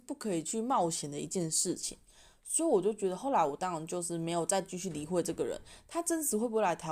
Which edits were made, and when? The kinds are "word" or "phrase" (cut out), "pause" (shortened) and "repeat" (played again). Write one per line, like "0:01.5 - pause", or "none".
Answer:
none